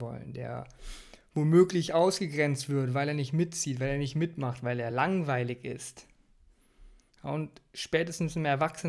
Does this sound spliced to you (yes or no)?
no